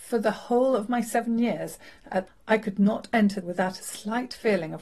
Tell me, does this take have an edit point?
yes; 2 cuts; at 2.3 s, 3.4 s

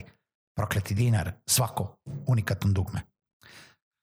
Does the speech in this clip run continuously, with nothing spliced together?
yes; 0 cuts

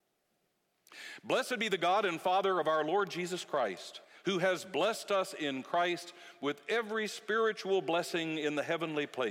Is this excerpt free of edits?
no; 1 cut; at 4.0 s

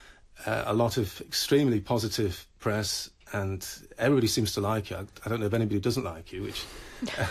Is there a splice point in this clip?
no; 0 cuts

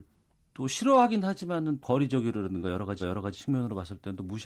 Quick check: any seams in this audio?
yes; 2 cuts; at 1.8 s, 3.0 s

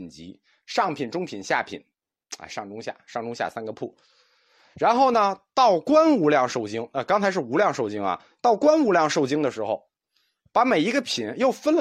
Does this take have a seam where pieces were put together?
no; 0 cuts

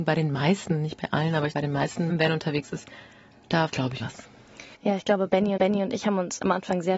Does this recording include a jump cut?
yes; 6 cuts; at 1.5 s, 2.1 s, 3.7 s, 4.0 s, 4.7 s, 5.6 s

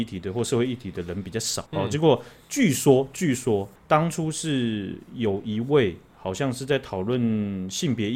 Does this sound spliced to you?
yes; 2 cuts; at 1.7 s, 3.8 s

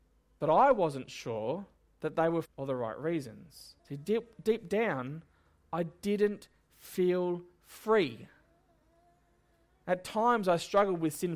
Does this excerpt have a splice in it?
yes; 3 cuts; at 1.9 s, 2.4 s, 3.8 s

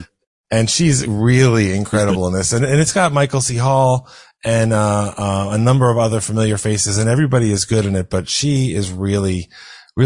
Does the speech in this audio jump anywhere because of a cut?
no; 0 cuts

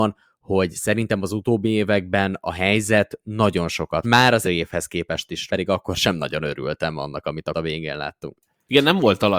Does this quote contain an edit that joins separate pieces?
yes; 4 cuts; at 4.0 s, 4.4 s, 5.5 s, 7.5 s

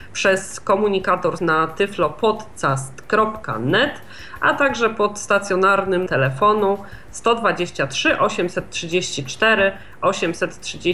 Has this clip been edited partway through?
yes; 2 cuts; at 1.4 s, 6.1 s

